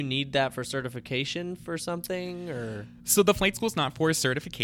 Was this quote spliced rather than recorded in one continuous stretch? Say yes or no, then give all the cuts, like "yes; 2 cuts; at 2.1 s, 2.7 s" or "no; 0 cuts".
no; 0 cuts